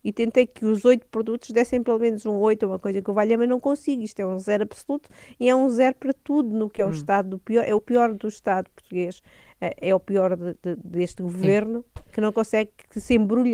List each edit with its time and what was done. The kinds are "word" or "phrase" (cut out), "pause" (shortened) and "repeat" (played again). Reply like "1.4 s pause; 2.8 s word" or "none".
none